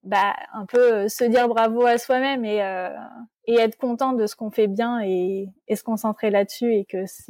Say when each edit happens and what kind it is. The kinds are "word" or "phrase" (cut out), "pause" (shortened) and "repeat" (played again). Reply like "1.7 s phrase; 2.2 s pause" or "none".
3.3 s pause